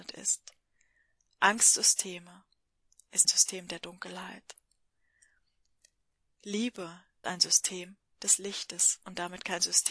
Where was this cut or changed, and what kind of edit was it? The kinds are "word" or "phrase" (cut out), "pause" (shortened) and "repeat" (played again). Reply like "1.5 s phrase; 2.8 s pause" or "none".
3.2 s word; 7.2 s word